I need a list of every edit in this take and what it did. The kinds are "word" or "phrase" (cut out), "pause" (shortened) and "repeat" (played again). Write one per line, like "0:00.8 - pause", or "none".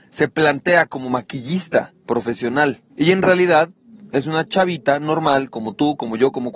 0:02.9 - pause

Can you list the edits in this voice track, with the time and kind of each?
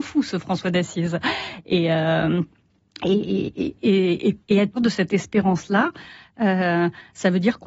0:04.4 - pause
0:04.8 - word

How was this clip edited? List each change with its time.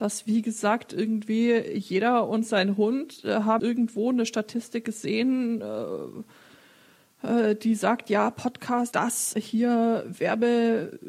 0:03.6 - word
0:08.9 - word
0:09.3 - word

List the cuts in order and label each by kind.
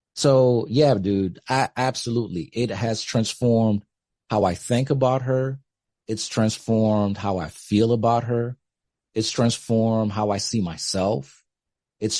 none

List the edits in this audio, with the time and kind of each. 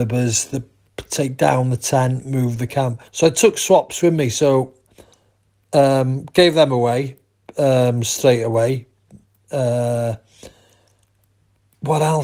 0:03.1 - pause

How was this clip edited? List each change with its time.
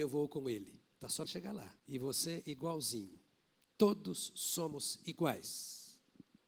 0:00.9 - pause
0:01.2 - phrase
0:01.8 - pause

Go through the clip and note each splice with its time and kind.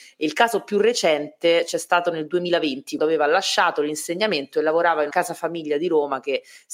0:03.0 - word
0:05.1 - word

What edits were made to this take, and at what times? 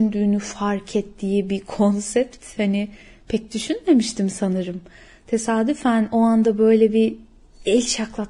none

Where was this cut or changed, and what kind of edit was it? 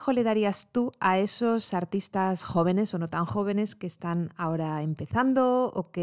none

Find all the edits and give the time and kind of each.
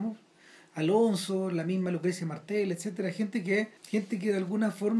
0:03.8 - pause

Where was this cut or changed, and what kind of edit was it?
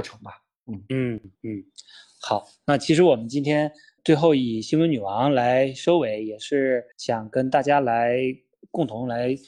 0:01.3 - pause
0:04.0 - word
0:06.9 - pause

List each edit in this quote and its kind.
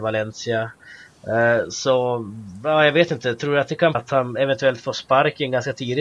0:03.9 - word

